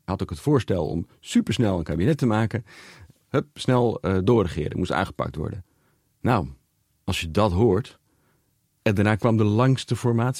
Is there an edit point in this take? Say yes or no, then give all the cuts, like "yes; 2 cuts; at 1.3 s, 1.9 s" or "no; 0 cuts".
no; 0 cuts